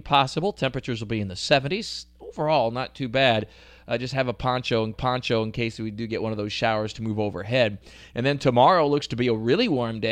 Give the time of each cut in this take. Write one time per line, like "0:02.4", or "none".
0:04.9